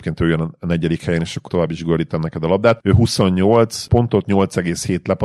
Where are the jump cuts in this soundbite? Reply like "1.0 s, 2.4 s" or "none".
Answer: 1.5 s